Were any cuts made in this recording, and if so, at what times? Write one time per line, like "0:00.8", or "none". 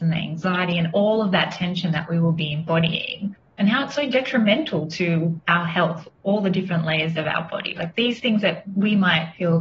none